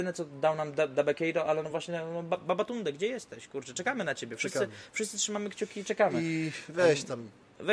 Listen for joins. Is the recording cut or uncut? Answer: uncut